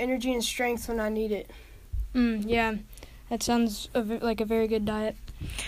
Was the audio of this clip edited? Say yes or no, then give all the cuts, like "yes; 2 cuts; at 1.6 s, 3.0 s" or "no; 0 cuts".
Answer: no; 0 cuts